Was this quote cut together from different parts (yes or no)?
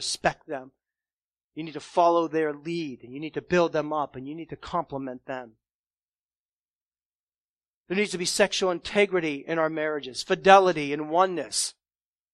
no